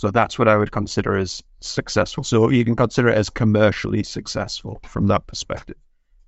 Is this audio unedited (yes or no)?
yes